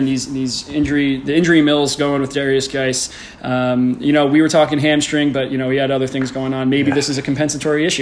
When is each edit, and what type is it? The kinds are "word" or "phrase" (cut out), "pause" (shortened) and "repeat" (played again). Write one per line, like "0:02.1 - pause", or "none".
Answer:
none